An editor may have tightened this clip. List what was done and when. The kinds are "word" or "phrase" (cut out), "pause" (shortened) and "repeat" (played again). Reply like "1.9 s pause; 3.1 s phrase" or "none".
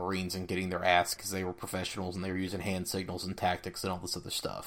1.1 s word